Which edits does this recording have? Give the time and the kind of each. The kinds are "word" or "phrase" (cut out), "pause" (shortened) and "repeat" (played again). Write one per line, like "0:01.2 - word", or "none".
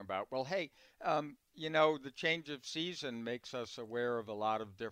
none